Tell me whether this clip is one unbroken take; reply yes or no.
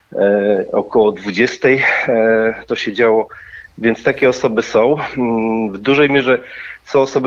yes